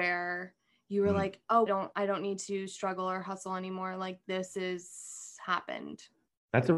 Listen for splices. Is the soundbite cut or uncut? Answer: cut